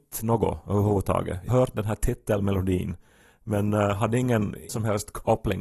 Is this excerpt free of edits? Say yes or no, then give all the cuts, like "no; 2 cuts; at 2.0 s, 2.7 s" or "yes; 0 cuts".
no; 2 cuts; at 1.5 s, 4.7 s